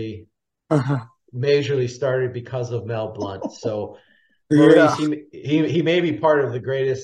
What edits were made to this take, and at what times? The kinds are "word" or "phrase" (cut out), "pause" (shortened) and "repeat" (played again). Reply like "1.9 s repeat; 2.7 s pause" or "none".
none

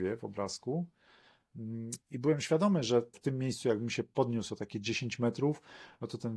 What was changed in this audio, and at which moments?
2.0 s pause; 3.1 s word

